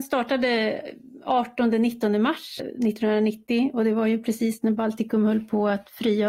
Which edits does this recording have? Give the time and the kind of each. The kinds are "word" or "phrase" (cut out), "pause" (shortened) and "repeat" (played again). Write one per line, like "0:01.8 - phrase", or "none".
0:02.6 - word